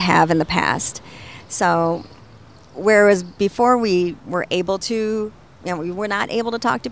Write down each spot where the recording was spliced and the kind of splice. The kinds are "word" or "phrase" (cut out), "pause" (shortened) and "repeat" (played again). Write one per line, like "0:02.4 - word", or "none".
none